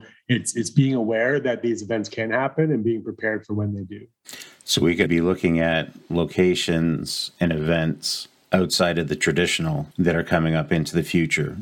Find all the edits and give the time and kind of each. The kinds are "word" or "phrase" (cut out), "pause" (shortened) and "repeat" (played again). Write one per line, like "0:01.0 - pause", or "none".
0:05.1 - word
0:09.9 - pause